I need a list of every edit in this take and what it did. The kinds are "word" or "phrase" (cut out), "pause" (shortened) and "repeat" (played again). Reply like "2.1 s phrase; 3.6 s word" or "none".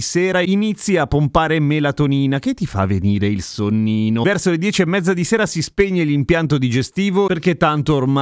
none

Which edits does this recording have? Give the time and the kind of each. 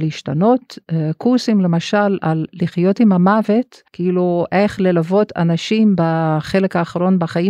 3.9 s pause

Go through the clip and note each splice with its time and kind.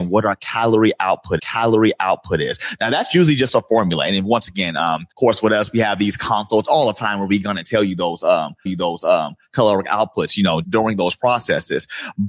1.4 s repeat; 5.1 s pause; 8.7 s repeat; 10.6 s word

